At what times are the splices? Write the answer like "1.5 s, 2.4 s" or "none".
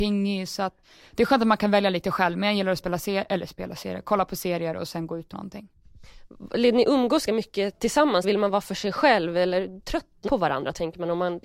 5.3 s, 7.3 s, 8.2 s, 10.3 s